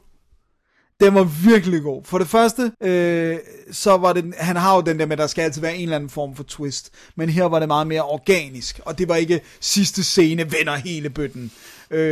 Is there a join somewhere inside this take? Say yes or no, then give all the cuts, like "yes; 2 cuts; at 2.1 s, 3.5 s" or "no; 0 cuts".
yes; 1 cut; at 2.7 s